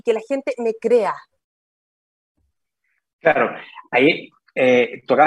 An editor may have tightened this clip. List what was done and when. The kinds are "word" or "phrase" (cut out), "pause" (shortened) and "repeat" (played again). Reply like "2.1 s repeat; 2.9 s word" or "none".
none

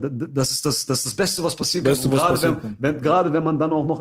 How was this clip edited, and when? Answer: none

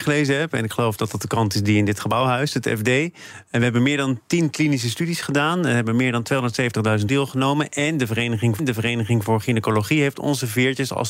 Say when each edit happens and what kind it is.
7.1 s word; 8.6 s repeat

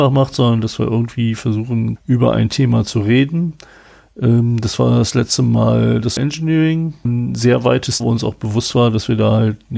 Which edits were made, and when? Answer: 2.0 s word; 6.2 s word; 7.0 s word; 8.0 s word

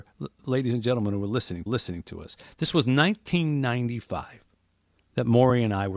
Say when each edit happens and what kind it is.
1.7 s repeat

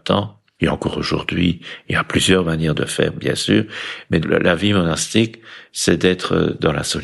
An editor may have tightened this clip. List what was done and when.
4.2 s word

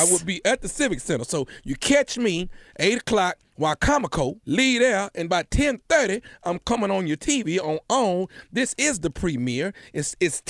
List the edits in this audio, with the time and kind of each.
4.4 s pause; 5.3 s word

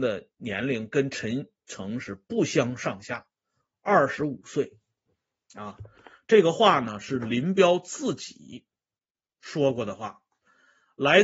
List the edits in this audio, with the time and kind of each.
none

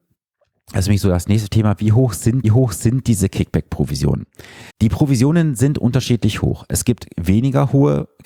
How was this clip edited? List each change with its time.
2.4 s repeat; 4.7 s pause

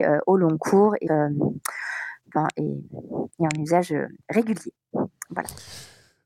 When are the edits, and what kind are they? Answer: 1.1 s phrase

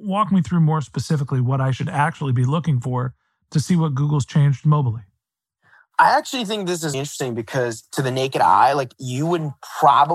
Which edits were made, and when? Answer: 6.9 s word

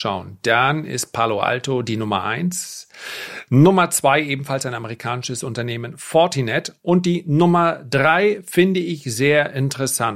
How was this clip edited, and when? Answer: none

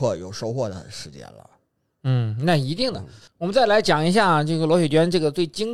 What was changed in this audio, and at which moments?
none

